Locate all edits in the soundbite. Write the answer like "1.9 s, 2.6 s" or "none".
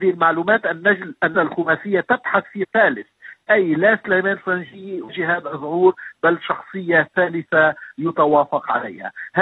1.3 s, 2.6 s, 5.1 s